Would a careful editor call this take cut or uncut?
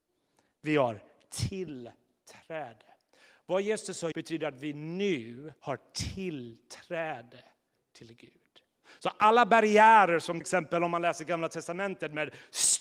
cut